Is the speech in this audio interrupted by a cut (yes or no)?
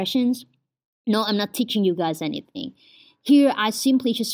no